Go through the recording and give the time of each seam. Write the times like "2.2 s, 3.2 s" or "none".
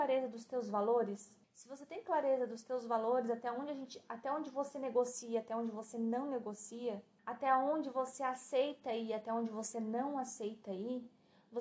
1.4 s, 7.2 s